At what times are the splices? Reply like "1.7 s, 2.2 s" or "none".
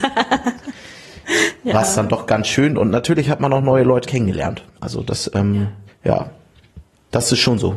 4.0 s, 5.9 s

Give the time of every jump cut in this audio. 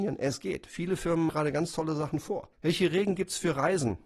1.3 s, 2.5 s

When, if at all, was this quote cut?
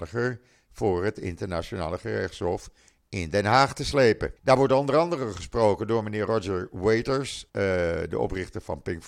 4.4 s, 7.5 s

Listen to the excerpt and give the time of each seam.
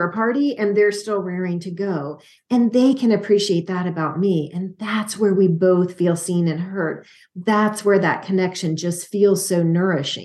none

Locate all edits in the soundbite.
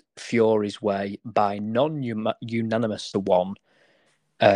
3.1 s

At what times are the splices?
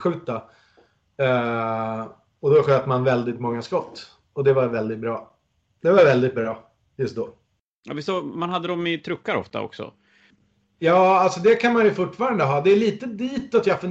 none

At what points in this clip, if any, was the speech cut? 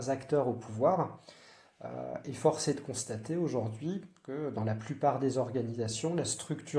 none

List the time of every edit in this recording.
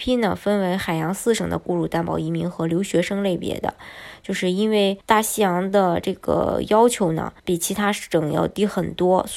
5.0 s, 7.4 s

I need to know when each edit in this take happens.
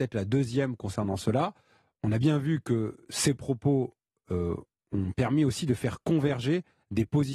none

